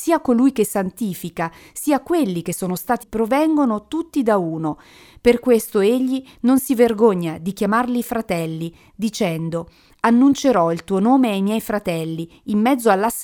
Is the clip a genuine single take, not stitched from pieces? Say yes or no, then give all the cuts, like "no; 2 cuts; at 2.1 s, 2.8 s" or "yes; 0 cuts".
no; 1 cut; at 3.0 s